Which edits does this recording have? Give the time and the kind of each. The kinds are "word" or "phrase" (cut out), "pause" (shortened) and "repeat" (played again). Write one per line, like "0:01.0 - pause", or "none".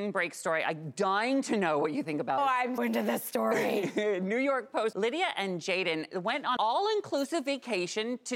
0:02.4 - word
0:02.8 - word
0:04.9 - word
0:06.6 - word